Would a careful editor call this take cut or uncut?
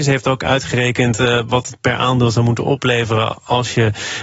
uncut